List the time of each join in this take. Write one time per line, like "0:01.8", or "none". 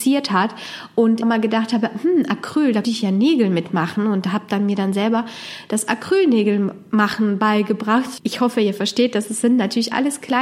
0:01.2
0:02.8
0:09.3